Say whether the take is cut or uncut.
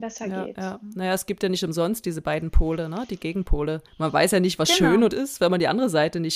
cut